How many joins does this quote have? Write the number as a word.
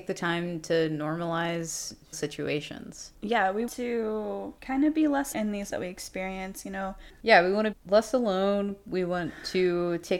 five